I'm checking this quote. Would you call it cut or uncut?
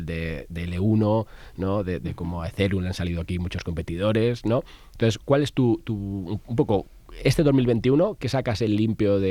uncut